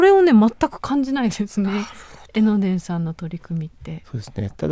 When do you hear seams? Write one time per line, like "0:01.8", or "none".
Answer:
none